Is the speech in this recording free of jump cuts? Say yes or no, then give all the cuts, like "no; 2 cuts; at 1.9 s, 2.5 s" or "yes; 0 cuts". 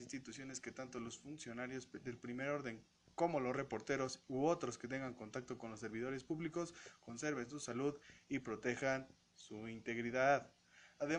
yes; 0 cuts